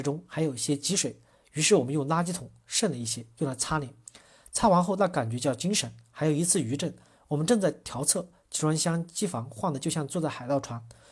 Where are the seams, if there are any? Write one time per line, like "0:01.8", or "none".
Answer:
none